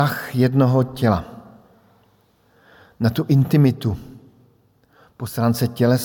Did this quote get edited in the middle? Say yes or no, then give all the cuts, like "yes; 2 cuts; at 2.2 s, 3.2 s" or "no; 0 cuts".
no; 0 cuts